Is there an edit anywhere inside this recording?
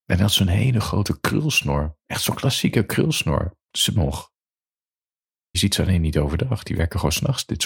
yes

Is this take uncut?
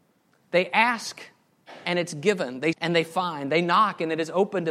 no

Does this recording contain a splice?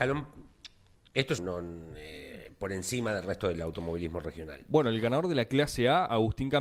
yes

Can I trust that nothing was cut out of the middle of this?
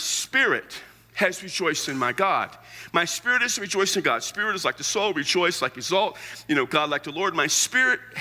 yes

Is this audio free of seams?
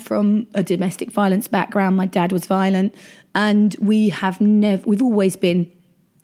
yes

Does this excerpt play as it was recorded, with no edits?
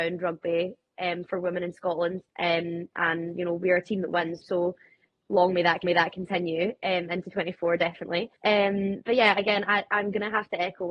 no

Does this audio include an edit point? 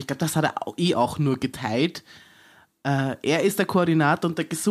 no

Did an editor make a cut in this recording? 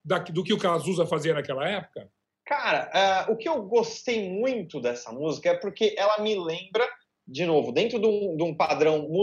yes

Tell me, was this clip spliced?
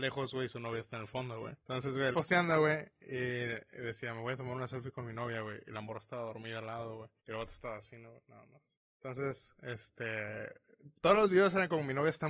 yes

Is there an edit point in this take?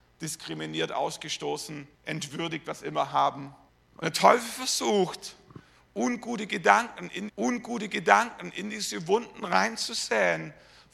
yes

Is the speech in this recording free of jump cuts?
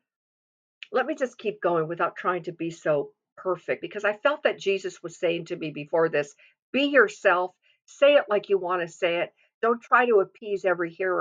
no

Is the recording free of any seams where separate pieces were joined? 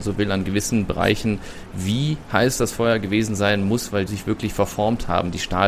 no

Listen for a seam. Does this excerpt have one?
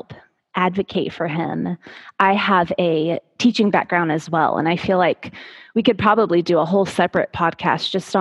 no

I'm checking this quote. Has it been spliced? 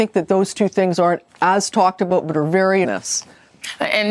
yes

